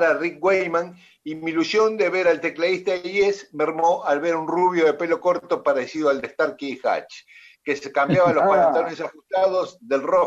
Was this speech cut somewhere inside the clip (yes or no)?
no